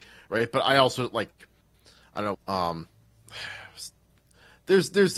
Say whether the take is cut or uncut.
cut